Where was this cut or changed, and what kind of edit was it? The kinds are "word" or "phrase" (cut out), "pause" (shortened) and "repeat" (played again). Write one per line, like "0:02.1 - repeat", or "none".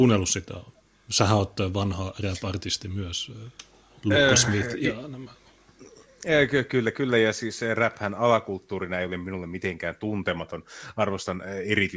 none

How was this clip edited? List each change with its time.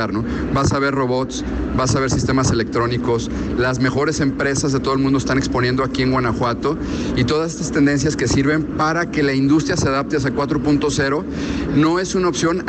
none

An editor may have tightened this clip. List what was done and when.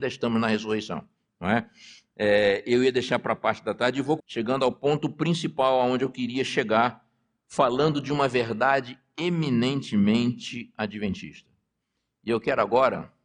0:04.2 - word

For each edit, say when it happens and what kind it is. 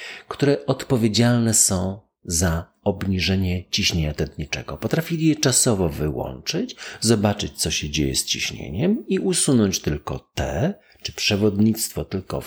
none

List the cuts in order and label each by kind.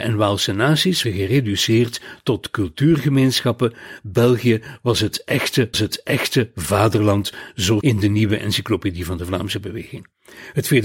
0:01.0 - word
0:05.7 - repeat
0:07.8 - phrase

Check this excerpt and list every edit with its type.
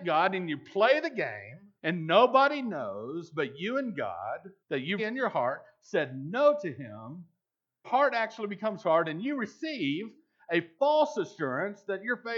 0:01.8 - pause
0:04.6 - pause
0:05.0 - word
0:07.8 - phrase

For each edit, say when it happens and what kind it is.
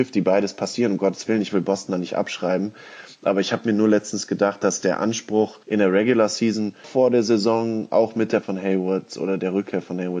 0:05.6 - pause
0:06.8 - word
0:08.4 - word

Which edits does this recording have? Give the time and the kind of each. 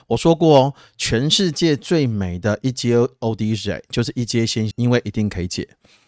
0:04.7 - word

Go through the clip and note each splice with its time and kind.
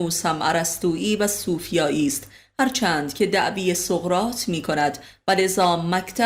none

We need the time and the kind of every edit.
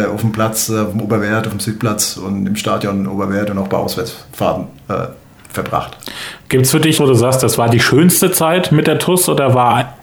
0:05.2 - pause
0:07.0 - word

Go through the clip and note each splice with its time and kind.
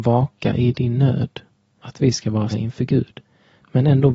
0:01.8 - word
0:02.5 - word

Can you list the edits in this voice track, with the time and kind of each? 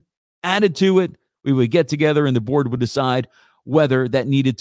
none

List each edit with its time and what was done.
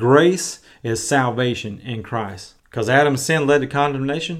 0:02.6 - pause

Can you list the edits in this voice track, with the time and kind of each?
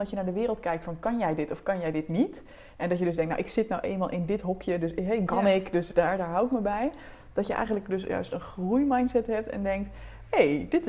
0:05.3 - phrase

